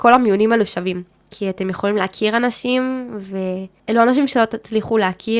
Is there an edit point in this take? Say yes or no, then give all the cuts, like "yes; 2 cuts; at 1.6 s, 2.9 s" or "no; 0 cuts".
no; 0 cuts